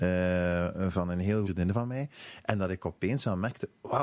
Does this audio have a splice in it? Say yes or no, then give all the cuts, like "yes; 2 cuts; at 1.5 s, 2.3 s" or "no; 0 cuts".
yes; 1 cut; at 1.4 s